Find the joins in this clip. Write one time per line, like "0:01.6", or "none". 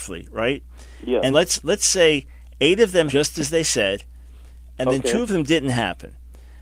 0:01.3
0:03.1